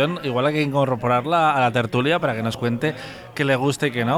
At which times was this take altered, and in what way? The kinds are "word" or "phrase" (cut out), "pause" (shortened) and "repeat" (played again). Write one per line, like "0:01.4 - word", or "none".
none